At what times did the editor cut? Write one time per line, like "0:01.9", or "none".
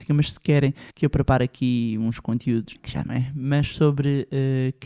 0:00.9
0:02.7
0:03.1